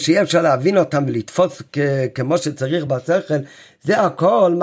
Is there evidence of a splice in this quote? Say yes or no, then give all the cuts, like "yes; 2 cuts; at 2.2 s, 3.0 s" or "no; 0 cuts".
no; 0 cuts